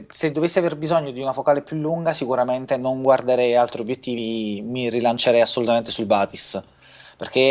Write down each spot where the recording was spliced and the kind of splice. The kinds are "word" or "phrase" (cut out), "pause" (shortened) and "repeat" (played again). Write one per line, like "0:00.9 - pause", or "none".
none